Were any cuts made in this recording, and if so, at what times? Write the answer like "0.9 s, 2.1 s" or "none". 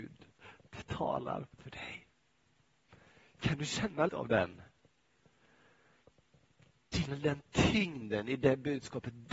1.5 s, 2.9 s, 4.1 s, 7.1 s